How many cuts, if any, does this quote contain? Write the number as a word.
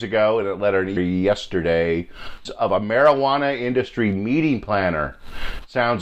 two